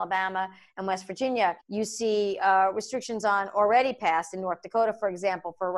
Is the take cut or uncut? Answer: cut